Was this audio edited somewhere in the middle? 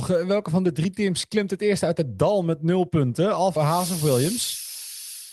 yes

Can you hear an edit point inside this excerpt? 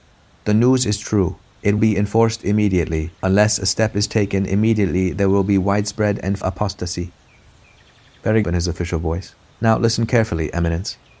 yes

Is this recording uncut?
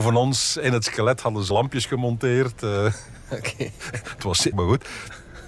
no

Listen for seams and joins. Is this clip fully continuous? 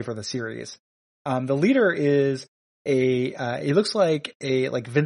yes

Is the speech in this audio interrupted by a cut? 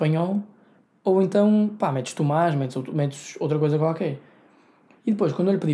no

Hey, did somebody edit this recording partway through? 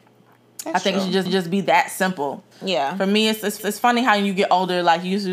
yes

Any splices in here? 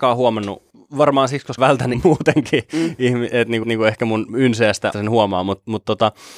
yes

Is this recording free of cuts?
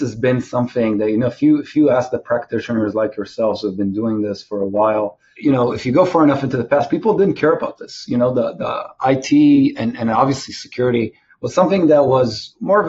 yes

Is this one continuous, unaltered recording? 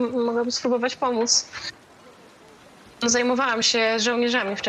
yes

